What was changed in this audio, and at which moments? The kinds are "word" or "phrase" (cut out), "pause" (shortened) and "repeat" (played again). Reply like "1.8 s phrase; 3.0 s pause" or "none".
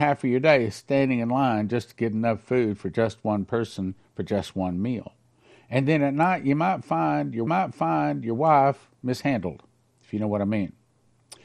7.5 s repeat